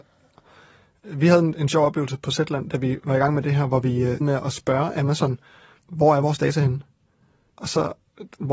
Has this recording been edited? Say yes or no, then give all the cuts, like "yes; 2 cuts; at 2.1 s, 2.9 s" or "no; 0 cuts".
yes; 1 cut; at 4.2 s